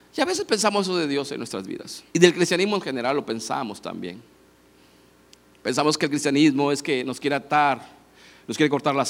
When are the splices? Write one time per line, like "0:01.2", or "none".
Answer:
0:02.1